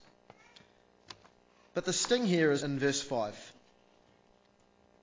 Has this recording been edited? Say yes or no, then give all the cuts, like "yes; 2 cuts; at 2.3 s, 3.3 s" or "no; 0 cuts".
yes; 1 cut; at 2.6 s